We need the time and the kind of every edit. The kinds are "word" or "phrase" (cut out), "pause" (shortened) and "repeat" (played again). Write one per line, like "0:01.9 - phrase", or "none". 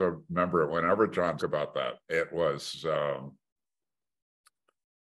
0:01.4 - word
0:02.0 - pause